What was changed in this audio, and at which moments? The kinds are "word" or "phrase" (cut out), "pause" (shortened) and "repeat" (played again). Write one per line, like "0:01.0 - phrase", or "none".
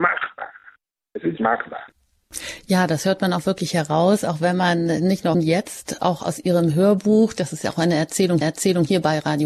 0:01.4 - word
0:05.3 - phrase
0:08.4 - repeat